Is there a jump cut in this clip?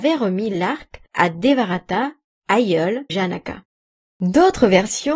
yes; 2 cuts; at 1.1 s, 3.1 s

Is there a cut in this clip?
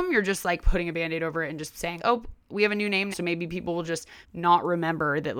yes; 4 cuts; at 2.0 s, 2.4 s, 3.1 s, 4.2 s

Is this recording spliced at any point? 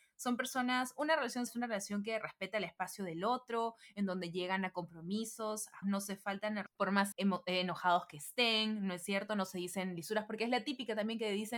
yes; 4 cuts; at 1.5 s, 5.8 s, 6.7 s, 7.1 s

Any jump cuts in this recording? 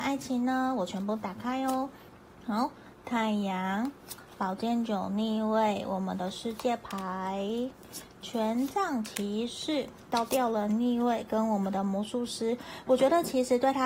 yes; 1 cut; at 2.1 s

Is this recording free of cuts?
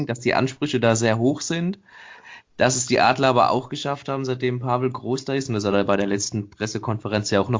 yes; 0 cuts

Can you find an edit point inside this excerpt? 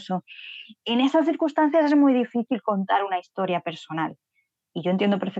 no; 0 cuts

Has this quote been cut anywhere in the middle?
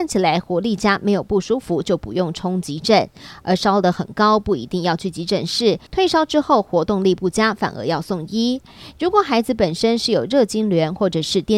yes; 1 cut; at 5.9 s

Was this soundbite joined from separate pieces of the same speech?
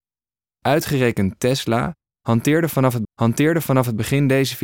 yes; 1 cut; at 3.0 s

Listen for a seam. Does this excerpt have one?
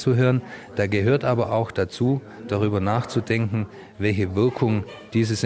no; 0 cuts

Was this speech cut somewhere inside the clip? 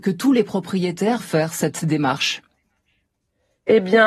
yes; 1 cut; at 1.2 s

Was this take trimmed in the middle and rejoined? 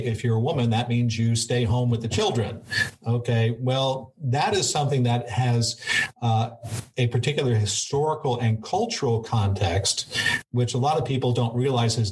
no; 0 cuts

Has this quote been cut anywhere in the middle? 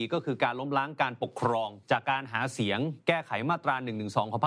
yes; 2 cuts; at 1.8 s, 3.0 s

